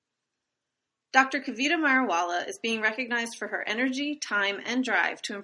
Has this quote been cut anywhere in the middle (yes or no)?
no